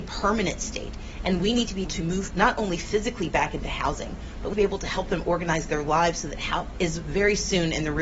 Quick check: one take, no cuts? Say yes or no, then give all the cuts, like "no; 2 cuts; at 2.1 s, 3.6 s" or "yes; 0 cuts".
no; 4 cuts; at 1.8 s, 2.3 s, 4.5 s, 6.7 s